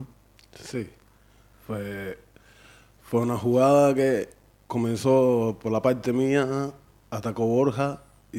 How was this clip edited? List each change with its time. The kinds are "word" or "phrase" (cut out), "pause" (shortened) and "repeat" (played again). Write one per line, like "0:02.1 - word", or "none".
none